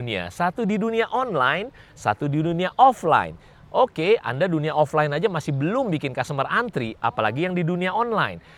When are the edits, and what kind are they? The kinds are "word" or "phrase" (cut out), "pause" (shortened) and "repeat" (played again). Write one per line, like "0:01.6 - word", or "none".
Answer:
none